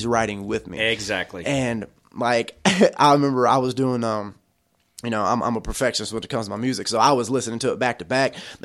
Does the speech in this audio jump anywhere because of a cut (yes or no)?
no